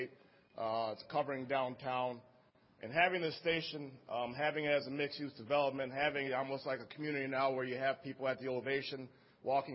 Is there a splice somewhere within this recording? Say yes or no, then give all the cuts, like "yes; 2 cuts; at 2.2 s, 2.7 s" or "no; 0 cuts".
yes; 1 cut; at 6.3 s